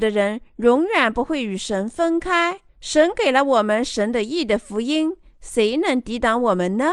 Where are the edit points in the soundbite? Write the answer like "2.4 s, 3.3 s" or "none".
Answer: 2.7 s